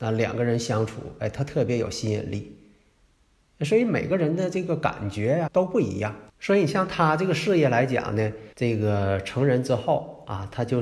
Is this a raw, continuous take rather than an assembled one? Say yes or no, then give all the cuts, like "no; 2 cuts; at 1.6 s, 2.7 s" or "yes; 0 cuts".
no; 3 cuts; at 5.5 s, 6.3 s, 8.5 s